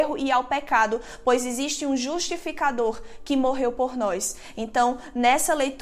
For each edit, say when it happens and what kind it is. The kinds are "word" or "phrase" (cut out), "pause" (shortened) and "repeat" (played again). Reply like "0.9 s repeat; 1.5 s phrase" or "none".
none